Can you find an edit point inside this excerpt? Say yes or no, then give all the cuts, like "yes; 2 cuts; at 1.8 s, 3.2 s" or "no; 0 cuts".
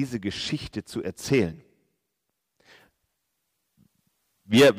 no; 0 cuts